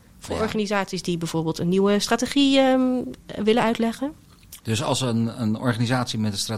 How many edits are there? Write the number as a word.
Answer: one